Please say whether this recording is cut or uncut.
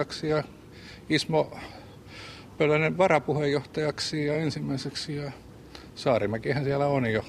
uncut